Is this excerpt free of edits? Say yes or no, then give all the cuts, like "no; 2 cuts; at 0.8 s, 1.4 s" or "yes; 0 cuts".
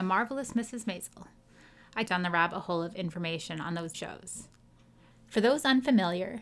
no; 2 cuts; at 2.1 s, 3.9 s